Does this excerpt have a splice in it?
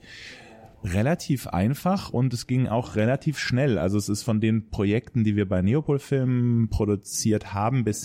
no; 0 cuts

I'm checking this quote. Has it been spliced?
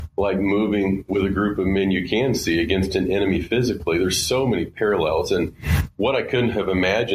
no; 0 cuts

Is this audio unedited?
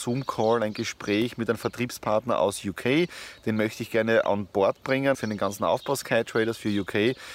no; 1 cut; at 5.1 s

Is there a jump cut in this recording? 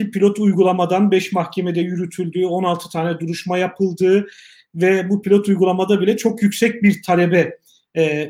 no; 0 cuts

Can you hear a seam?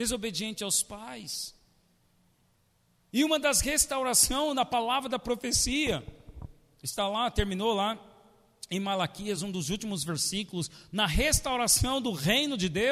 no; 0 cuts

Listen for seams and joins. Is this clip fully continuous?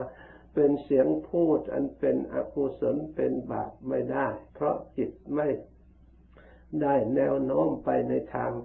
no; 1 cut; at 4.5 s

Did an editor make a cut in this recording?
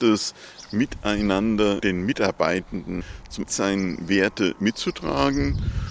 yes; 2 cuts; at 1.8 s, 3.5 s

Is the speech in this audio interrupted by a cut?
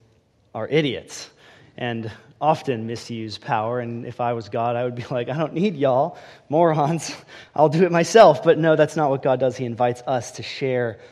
no; 0 cuts

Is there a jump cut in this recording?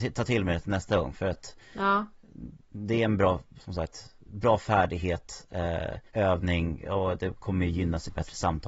yes; 2 cuts; at 2.6 s, 6.1 s

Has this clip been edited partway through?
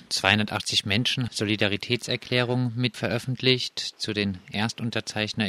yes; 2 cuts; at 1.3 s, 2.9 s

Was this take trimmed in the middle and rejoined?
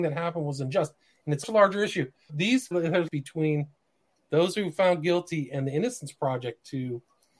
yes; 4 cuts; at 1.4 s, 2.3 s, 2.7 s, 3.1 s

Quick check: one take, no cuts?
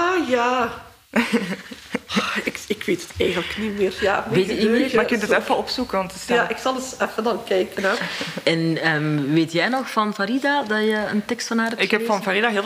yes; 0 cuts

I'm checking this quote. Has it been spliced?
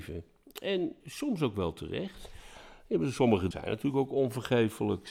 yes; 2 cuts; at 1.0 s, 3.5 s

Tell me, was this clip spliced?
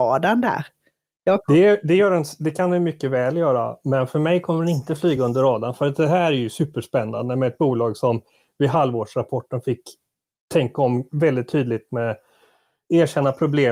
no; 0 cuts

